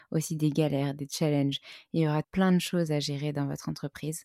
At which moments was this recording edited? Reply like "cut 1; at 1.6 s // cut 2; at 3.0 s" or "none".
cut 1; at 2.2 s